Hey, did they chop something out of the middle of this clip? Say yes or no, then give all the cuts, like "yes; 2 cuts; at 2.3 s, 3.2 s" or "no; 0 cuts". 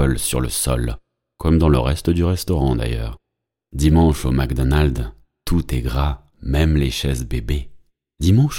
no; 0 cuts